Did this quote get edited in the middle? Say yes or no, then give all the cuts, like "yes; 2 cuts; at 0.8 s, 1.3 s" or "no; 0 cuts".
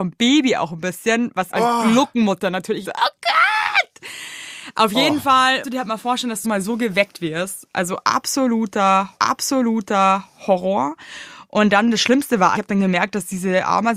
yes; 6 cuts; at 1.5 s, 2.8 s, 5.6 s, 6.4 s, 9.2 s, 12.6 s